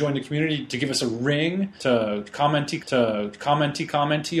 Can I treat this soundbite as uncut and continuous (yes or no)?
no